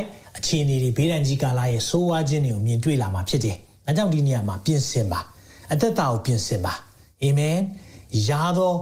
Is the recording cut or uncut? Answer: uncut